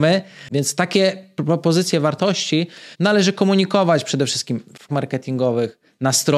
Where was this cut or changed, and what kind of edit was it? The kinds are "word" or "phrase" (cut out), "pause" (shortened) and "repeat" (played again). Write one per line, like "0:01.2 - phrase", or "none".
0:02.9 - pause
0:04.9 - word